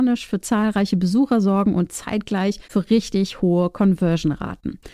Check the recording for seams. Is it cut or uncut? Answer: cut